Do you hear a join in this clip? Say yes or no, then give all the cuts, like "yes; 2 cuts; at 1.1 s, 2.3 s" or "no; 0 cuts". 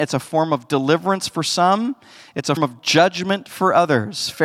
yes; 1 cut; at 2.6 s